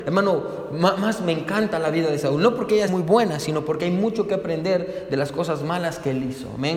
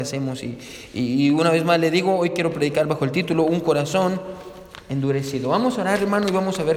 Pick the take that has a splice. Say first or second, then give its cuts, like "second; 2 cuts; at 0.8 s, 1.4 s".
first; 1 cut; at 2.9 s